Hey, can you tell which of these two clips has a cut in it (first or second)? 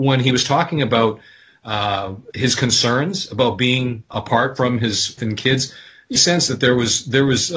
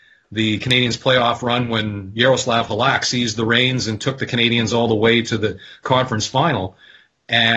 first